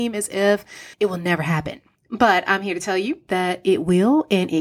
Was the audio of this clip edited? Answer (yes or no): yes